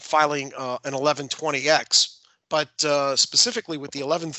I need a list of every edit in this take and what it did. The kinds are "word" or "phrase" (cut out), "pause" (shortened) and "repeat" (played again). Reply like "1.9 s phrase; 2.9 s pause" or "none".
none

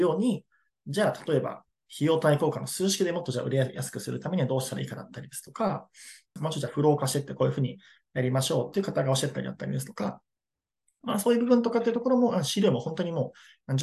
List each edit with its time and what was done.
none

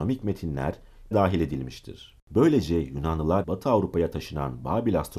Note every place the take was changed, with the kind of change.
1.1 s phrase; 2.2 s pause; 3.4 s word

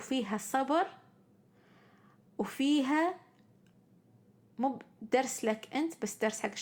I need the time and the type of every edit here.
none

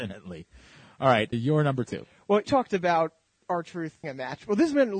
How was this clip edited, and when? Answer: 1.3 s word; 2.4 s word; 4.0 s word

